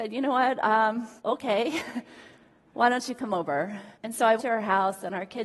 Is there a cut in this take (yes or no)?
yes